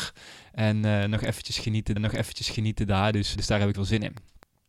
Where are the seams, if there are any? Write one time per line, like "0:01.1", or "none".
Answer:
0:02.0
0:03.3
0:03.7

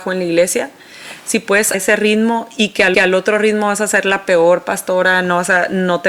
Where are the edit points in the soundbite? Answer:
0:01.7
0:02.9

